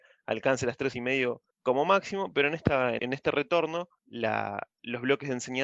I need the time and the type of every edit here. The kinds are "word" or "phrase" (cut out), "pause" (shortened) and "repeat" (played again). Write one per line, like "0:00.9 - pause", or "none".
0:00.9 - word
0:01.5 - pause
0:03.0 - word
0:04.0 - pause